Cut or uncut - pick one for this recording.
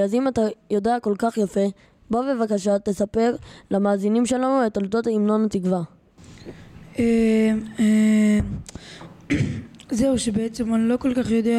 uncut